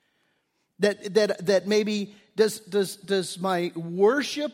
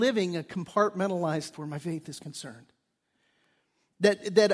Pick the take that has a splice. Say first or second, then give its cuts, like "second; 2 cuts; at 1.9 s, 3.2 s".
second; 1 cut; at 1.5 s